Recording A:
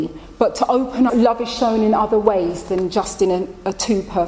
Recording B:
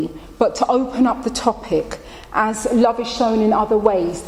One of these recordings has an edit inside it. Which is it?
A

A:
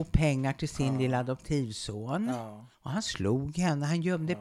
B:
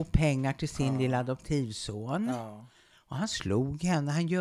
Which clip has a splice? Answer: A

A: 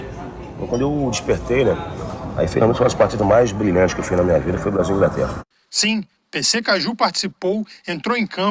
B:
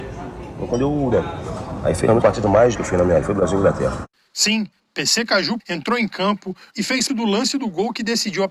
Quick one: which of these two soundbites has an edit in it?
B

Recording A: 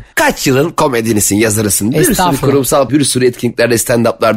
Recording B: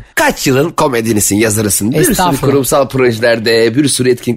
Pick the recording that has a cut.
A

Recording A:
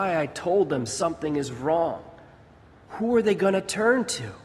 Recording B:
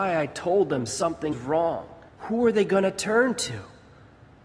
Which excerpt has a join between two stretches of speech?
B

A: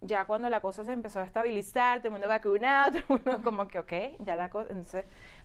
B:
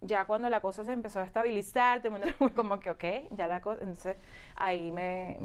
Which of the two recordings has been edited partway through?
B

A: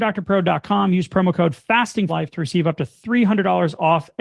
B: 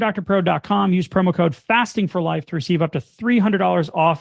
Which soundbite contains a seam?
A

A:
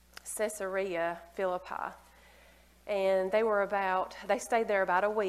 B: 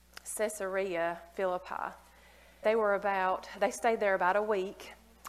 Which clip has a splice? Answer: B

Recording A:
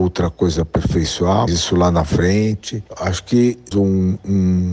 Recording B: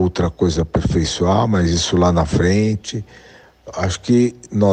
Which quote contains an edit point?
A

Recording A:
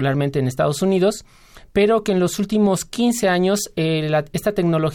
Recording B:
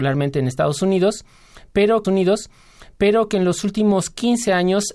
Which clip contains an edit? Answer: B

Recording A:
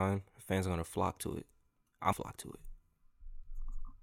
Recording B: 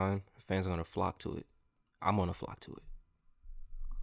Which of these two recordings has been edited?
A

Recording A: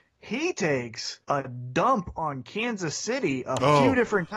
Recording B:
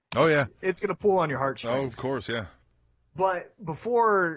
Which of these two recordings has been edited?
A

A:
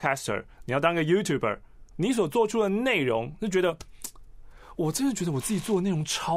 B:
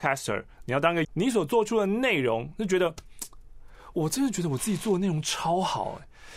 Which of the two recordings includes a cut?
B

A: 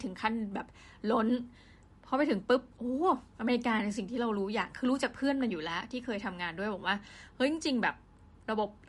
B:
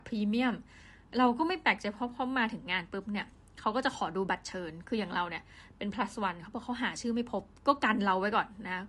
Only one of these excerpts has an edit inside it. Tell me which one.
A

